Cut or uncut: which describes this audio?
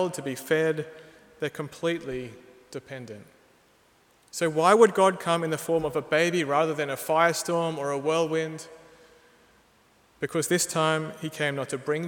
uncut